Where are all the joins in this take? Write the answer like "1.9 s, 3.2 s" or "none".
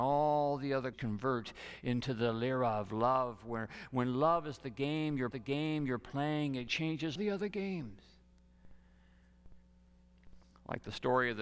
0.9 s, 5.3 s, 7.2 s, 10.5 s